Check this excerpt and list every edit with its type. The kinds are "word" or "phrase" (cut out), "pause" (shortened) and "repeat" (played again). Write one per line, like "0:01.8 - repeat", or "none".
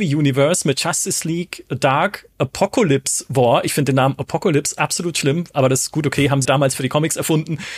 0:06.4 - word